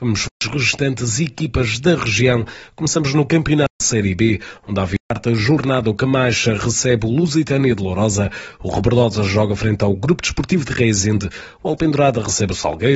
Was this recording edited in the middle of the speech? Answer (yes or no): no